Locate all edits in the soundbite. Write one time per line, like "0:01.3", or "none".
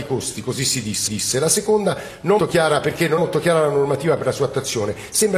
0:01.1
0:02.4
0:03.2